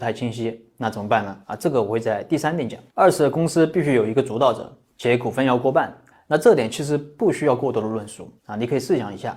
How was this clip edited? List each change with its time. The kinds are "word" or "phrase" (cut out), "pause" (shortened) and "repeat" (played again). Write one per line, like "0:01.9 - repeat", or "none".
0:01.4 - pause
0:02.9 - pause
0:06.1 - pause
0:08.4 - pause